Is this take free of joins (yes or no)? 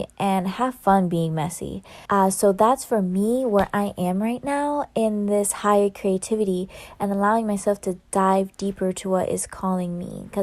no